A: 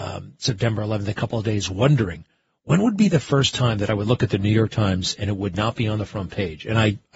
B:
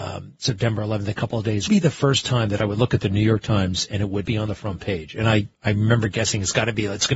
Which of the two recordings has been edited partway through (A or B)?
B